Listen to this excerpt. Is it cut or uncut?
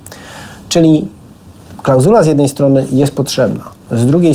uncut